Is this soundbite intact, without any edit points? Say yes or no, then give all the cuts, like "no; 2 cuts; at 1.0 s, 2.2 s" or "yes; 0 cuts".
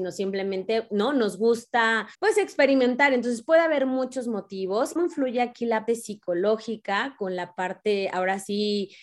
no; 3 cuts; at 2.1 s, 5.0 s, 5.9 s